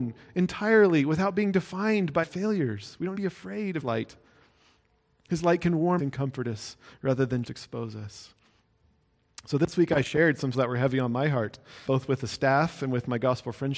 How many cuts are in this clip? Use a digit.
7